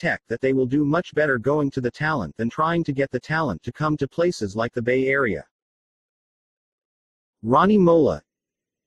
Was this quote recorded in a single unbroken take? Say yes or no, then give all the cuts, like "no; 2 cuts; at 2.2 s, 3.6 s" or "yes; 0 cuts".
yes; 0 cuts